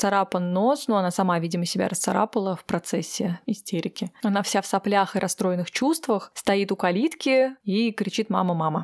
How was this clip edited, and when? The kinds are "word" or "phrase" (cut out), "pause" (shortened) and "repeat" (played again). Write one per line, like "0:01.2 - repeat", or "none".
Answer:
none